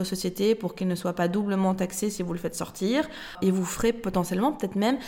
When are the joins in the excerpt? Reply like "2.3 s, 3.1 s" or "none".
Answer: none